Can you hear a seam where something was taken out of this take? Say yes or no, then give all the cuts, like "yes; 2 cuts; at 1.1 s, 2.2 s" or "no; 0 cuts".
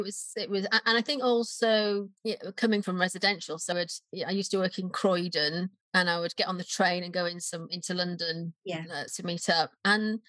yes; 5 cuts; at 2.2 s, 2.8 s, 3.7 s, 5.8 s, 9.1 s